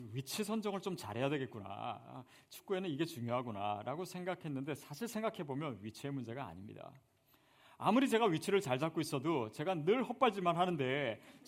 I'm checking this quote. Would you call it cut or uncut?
uncut